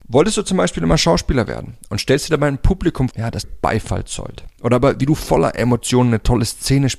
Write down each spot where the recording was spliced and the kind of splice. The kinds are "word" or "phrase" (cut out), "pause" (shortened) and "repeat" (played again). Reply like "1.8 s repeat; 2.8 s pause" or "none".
3.1 s word; 3.4 s word